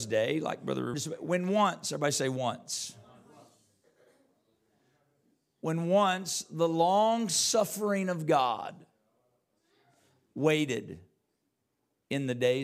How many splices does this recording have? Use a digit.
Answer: 1